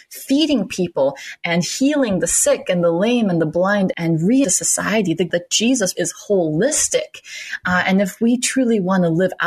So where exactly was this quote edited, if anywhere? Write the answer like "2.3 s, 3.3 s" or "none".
3.9 s, 4.4 s, 5.3 s, 6.0 s